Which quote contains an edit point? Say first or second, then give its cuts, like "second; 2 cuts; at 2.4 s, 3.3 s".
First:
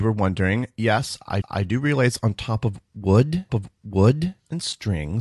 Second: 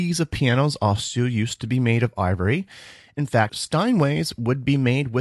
first; 2 cuts; at 1.4 s, 3.5 s